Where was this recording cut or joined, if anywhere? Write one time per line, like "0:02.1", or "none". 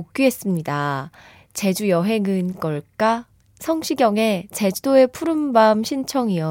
0:02.5